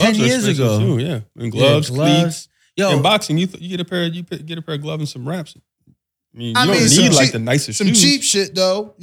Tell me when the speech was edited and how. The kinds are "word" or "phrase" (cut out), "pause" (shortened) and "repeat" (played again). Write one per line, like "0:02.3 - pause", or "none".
none

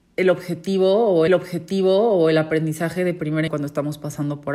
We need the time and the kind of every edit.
0:01.3 - repeat
0:03.5 - word

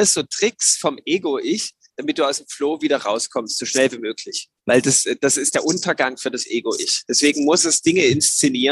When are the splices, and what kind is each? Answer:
0:04.6 - pause

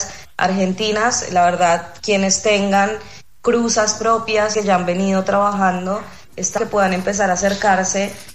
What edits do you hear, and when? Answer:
0:04.5 - phrase
0:06.6 - word

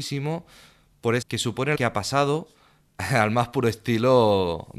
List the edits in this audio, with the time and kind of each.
0:01.2 - phrase
0:01.8 - word

